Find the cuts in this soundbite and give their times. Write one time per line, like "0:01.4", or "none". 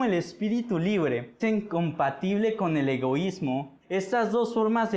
0:01.4
0:03.8